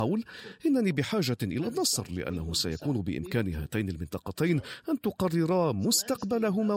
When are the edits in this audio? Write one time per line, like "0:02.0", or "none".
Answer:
none